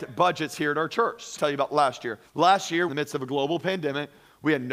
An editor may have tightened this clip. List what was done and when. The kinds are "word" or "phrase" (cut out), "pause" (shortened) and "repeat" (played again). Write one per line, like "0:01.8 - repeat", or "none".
0:01.4 - phrase
0:02.3 - pause
0:02.9 - phrase